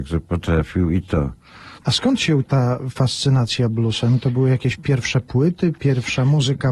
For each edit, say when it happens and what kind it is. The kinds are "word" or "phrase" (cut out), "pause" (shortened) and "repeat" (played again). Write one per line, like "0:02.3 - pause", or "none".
0:01.8 - pause
0:02.4 - phrase